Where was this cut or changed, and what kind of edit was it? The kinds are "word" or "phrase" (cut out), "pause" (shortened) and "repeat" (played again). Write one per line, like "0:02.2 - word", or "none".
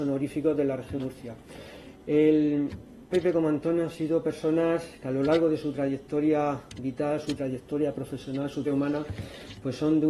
0:01.0 - word
0:03.1 - word
0:08.6 - word